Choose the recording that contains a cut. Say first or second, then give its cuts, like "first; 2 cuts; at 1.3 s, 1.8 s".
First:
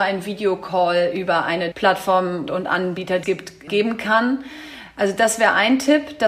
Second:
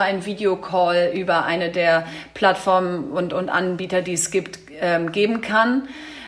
first; 4 cuts; at 1.7 s, 2.5 s, 3.2 s, 3.7 s